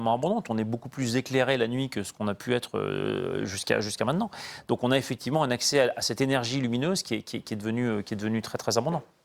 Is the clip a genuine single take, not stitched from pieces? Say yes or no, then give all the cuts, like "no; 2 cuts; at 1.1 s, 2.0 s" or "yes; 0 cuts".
yes; 0 cuts